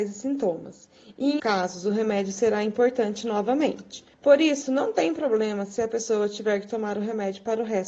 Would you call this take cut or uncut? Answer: cut